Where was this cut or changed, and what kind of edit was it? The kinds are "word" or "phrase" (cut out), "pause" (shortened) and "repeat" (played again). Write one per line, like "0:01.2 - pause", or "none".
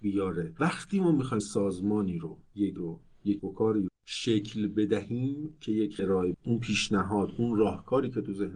0:01.4 - word
0:02.8 - word
0:03.4 - word
0:03.9 - word
0:06.0 - word
0:06.3 - word